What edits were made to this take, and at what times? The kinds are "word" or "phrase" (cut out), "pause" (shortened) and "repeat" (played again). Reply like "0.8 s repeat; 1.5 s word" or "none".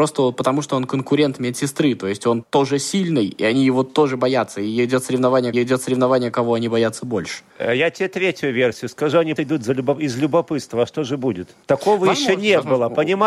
2.4 s word; 5.5 s repeat; 7.5 s pause; 9.4 s word; 11.6 s pause